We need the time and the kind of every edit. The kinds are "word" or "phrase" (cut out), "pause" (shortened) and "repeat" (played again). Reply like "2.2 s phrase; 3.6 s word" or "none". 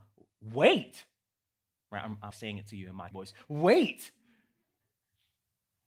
2.3 s word; 3.1 s phrase

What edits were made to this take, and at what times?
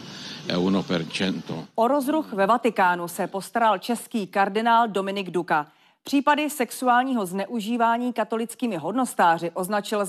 none

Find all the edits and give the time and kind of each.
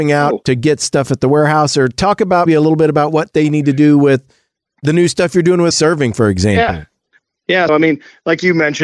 2.5 s word; 5.7 s word; 7.7 s word

